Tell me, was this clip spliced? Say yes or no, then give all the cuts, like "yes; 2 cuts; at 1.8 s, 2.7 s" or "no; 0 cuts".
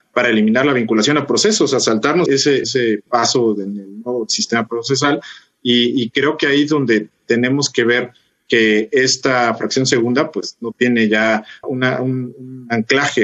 yes; 3 cuts; at 2.3 s, 2.6 s, 11.6 s